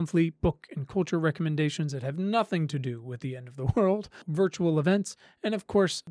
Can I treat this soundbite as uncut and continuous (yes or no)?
yes